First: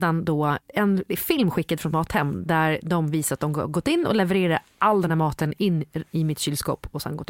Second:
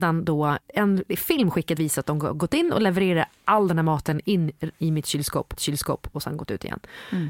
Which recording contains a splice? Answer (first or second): second